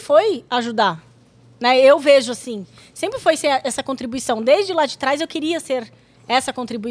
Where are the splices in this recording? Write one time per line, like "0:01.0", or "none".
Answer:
none